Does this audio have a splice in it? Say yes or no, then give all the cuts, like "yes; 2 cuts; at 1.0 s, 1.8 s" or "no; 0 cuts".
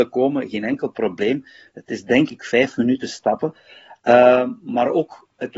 no; 0 cuts